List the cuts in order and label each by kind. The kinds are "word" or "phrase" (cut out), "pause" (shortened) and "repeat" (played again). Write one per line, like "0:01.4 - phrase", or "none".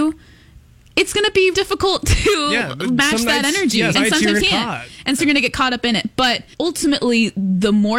0:01.5 - word
0:03.9 - word
0:04.4 - word
0:05.2 - word
0:06.5 - pause